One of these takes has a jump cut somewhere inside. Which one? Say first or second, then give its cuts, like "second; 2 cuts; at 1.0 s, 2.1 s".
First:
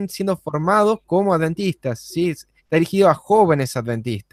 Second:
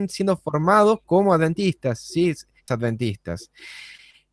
second; 1 cut; at 2.7 s